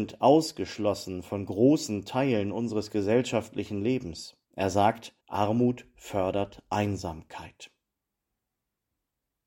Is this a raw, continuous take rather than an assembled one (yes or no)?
no